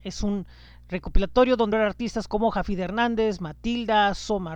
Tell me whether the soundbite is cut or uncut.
cut